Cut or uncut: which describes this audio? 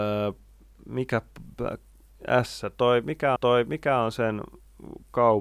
cut